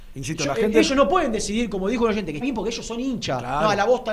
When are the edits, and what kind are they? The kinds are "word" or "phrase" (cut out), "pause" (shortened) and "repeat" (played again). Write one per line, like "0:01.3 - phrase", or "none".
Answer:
0:02.4 - word